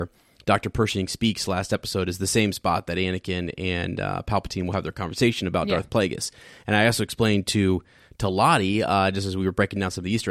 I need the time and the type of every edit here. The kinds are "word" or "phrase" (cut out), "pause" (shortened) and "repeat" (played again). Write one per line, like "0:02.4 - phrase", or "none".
none